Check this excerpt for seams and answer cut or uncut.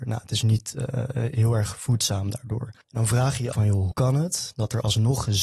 cut